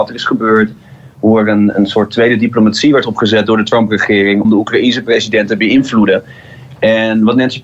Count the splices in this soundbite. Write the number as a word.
two